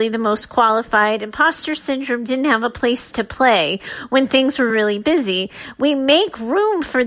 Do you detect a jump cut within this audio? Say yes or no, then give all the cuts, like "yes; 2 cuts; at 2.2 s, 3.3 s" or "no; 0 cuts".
no; 0 cuts